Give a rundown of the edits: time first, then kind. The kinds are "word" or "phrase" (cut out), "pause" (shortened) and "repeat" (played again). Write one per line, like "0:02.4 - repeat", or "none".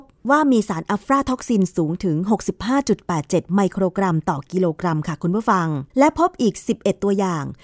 0:05.9 - pause

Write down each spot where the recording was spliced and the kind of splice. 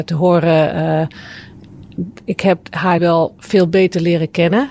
0:02.6 - word
0:03.0 - word

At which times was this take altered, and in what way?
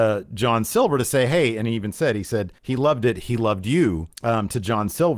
0:02.6 - pause
0:04.1 - pause

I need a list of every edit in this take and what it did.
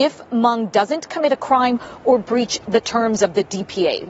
none

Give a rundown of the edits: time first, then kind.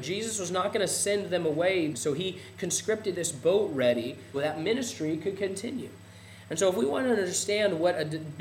0:01.9 - word
0:03.1 - phrase
0:04.3 - word

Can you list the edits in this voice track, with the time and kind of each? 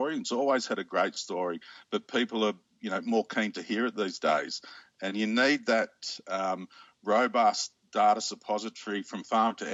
none

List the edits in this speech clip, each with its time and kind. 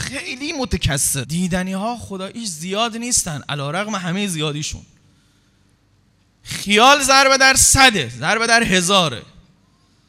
none

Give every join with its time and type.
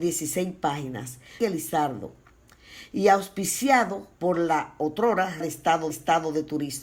0:01.4 - phrase
0:04.1 - pause
0:05.4 - word
0:05.9 - repeat

